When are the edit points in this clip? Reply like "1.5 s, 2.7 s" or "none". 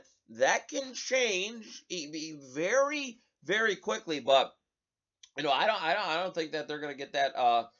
none